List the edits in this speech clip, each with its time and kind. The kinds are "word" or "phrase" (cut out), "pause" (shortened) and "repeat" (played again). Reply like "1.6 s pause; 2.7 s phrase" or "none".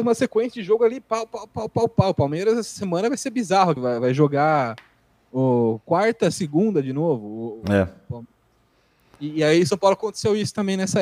3.8 s word; 6.3 s word